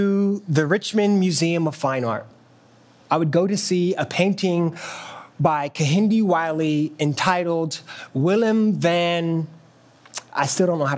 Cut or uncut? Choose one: uncut